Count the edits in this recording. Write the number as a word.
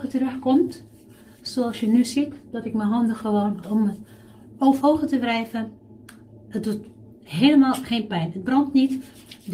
two